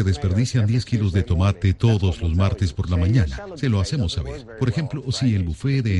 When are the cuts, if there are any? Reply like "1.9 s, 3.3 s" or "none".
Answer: none